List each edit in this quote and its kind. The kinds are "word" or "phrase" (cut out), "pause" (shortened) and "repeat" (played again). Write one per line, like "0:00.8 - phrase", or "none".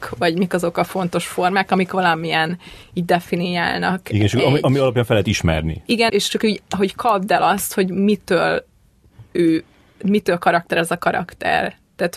0:06.1 - word